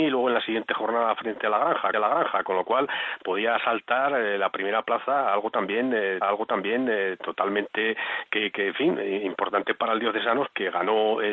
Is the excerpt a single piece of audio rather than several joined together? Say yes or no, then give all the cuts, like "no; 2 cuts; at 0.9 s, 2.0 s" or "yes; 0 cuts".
no; 3 cuts; at 1.9 s, 6.2 s, 8.5 s